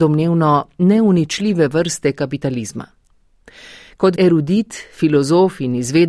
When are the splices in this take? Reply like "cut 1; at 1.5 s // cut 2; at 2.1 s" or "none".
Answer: cut 1; at 4.2 s